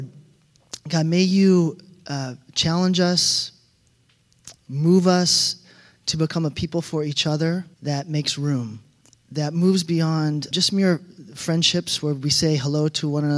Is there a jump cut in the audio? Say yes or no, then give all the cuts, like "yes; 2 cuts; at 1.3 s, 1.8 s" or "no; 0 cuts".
yes; 3 cuts; at 7.7 s, 9.0 s, 10.5 s